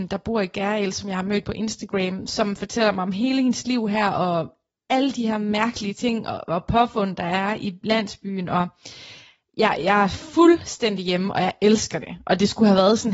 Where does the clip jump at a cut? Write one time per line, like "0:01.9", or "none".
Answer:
none